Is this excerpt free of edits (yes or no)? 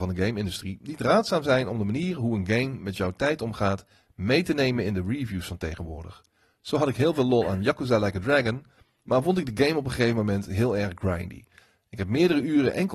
yes